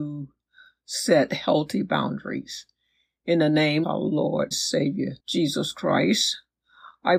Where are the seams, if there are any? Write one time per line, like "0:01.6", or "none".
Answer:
0:03.8
0:04.5
0:05.2